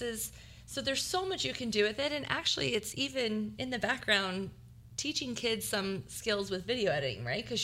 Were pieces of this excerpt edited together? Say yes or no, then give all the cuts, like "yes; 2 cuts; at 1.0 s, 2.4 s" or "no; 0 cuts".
no; 0 cuts